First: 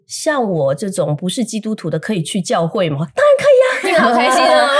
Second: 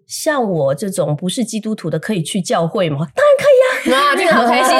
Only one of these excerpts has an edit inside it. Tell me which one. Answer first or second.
first